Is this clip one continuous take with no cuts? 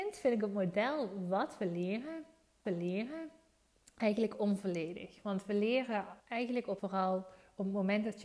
no; 3 cuts; at 2.7 s, 6.2 s, 6.8 s

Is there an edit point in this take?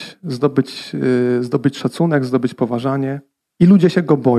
no; 0 cuts

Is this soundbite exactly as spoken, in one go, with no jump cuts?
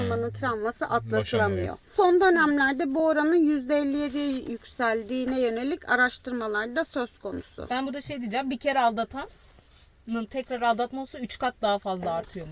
yes; 0 cuts

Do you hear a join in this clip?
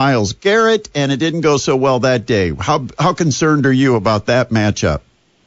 no; 0 cuts

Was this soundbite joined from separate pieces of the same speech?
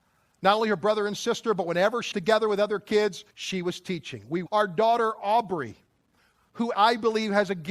yes; 4 cuts; at 2.1 s, 3.3 s, 4.5 s, 6.7 s

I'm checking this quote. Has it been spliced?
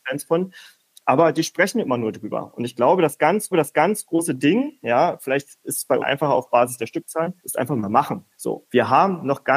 yes; 4 cuts; at 3.5 s, 6.0 s, 7.4 s, 8.3 s

